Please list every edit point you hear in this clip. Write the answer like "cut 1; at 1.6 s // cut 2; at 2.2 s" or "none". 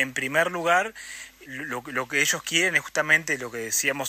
cut 1; at 1.5 s

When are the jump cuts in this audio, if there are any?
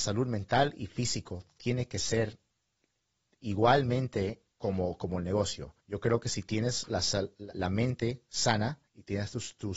cut 1; at 4.5 s // cut 2; at 5.8 s // cut 3; at 7.5 s // cut 4; at 8.9 s

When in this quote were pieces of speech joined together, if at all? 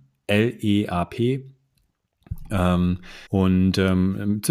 cut 1; at 3.3 s

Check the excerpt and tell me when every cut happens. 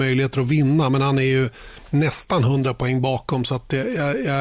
none

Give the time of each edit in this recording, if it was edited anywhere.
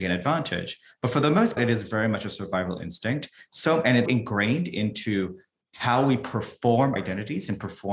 cut 1; at 1.6 s // cut 2; at 4.1 s // cut 3; at 7.0 s

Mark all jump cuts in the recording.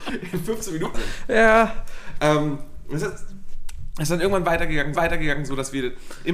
cut 1; at 0.9 s // cut 2; at 4.9 s

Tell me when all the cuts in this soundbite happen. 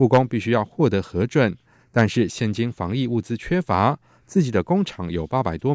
none

